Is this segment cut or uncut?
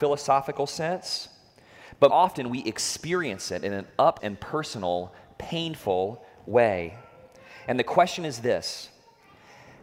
cut